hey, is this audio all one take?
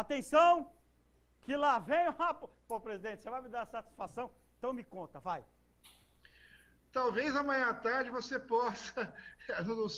yes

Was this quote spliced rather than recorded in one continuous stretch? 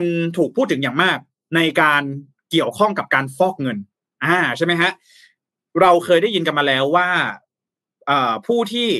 no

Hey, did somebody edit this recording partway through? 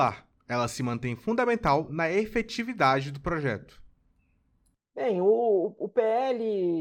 no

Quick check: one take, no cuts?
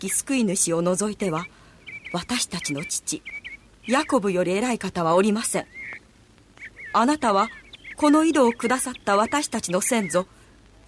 yes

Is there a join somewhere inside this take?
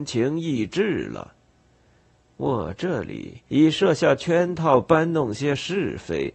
yes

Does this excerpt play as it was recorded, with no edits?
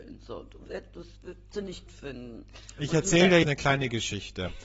no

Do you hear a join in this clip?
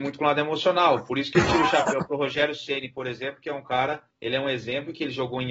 yes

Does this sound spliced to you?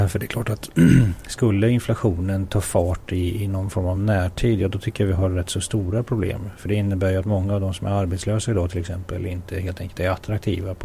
no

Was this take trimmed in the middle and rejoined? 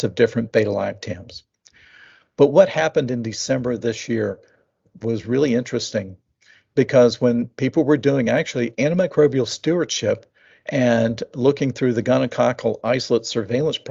no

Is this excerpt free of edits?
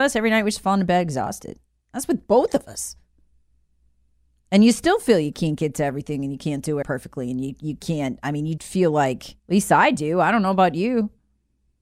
no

